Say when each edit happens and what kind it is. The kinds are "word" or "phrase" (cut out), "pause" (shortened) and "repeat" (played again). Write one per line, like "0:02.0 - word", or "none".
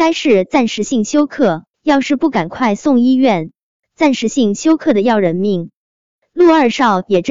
0:01.7 - pause